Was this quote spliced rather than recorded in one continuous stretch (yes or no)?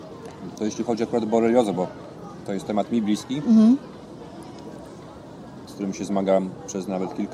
no